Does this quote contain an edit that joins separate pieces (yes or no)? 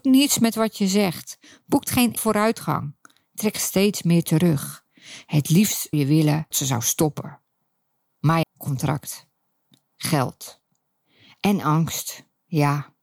yes